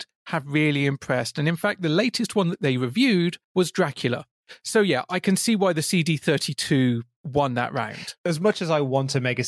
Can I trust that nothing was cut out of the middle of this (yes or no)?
no